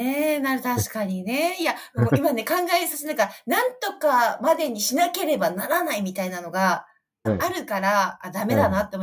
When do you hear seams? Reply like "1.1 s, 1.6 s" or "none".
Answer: 7.3 s

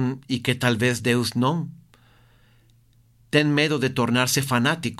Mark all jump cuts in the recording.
none

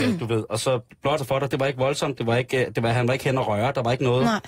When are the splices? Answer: 1.2 s

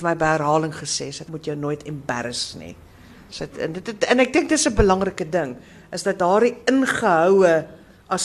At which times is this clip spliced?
1.3 s, 4.8 s

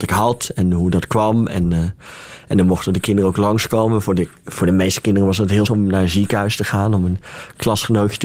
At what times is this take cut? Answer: 5.7 s

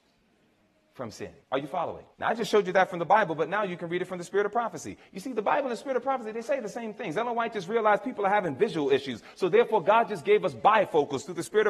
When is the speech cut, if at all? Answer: 1.4 s, 2.1 s

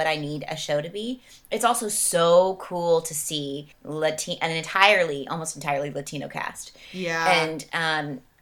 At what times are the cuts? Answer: 3.7 s

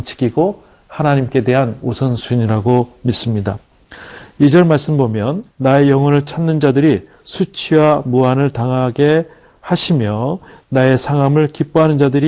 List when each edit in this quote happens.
5.5 s

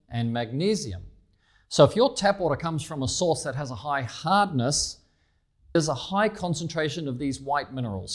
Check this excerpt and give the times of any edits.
5.8 s

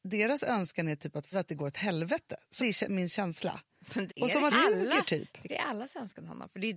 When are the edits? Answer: 1.3 s, 2.6 s, 4.1 s, 4.5 s, 5.5 s

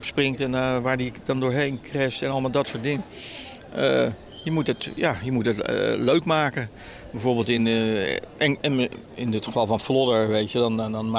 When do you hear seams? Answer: none

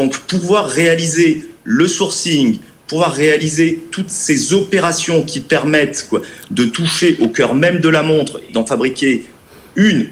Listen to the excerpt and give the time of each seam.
8.5 s

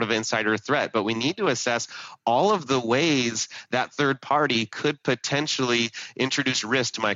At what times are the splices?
none

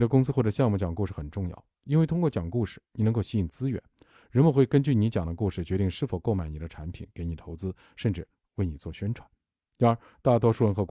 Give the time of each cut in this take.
none

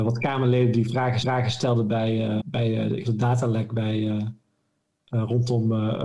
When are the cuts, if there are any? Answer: 1.2 s, 2.4 s, 3.0 s

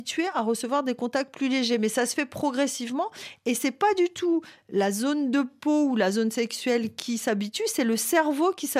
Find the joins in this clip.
none

